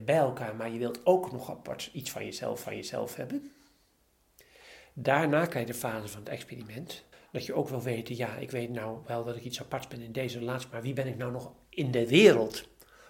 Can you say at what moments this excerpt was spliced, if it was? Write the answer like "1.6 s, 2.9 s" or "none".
2.6 s, 7.1 s